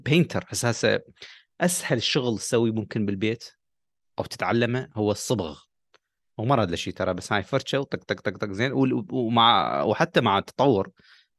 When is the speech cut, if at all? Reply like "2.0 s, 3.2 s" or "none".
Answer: none